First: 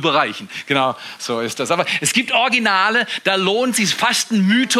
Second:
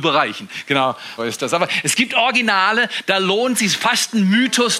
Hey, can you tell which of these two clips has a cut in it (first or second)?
second